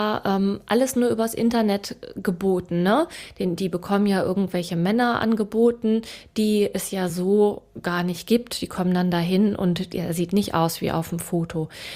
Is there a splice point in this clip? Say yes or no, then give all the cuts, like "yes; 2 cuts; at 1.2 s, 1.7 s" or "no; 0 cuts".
no; 0 cuts